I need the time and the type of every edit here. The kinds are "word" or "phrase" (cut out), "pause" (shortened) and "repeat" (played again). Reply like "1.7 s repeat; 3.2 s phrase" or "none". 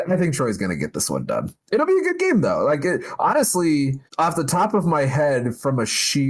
4.1 s pause